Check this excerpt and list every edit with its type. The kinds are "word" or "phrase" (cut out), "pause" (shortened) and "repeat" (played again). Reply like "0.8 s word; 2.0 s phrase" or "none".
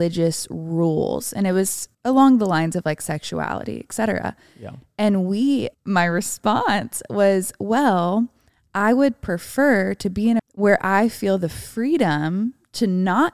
1.9 s pause; 5.7 s pause; 10.4 s phrase